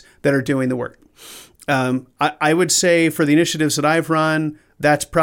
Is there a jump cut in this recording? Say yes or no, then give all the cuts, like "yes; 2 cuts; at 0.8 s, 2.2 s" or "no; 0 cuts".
no; 0 cuts